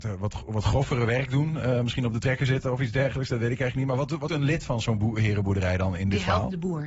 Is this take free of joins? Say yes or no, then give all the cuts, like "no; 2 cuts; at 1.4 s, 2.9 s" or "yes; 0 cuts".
no; 1 cut; at 4.3 s